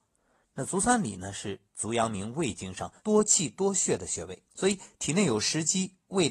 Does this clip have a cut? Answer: yes; 3 cuts; at 1.6 s, 3.0 s, 4.5 s

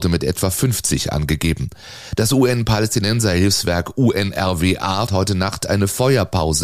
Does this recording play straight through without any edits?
no; 1 cut; at 5.1 s

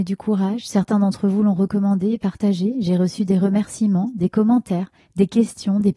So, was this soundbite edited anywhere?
no; 0 cuts

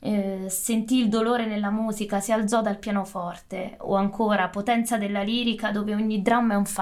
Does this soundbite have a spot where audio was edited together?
no; 0 cuts

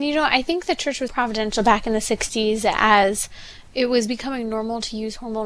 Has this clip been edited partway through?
yes; 1 cut; at 1.1 s

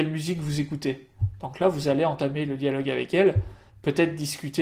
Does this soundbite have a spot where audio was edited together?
no; 0 cuts

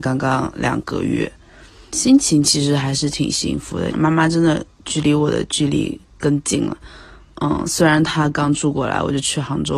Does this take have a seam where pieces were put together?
yes; 2 cuts; at 1.9 s, 3.9 s

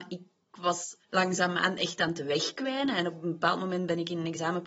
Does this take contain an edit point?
yes; 1 cut; at 1.0 s

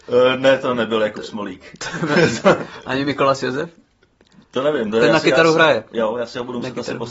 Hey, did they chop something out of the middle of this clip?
no; 0 cuts

